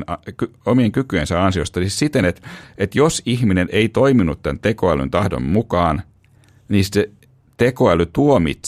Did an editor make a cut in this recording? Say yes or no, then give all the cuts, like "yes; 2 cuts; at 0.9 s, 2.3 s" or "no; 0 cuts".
no; 0 cuts